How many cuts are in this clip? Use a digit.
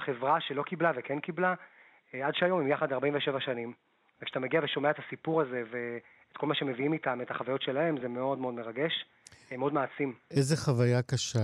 0